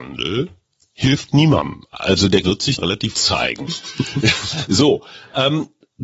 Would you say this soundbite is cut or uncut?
cut